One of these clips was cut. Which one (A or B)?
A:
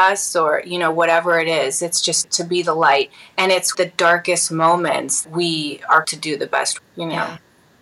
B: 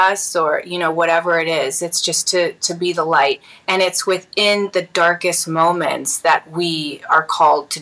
A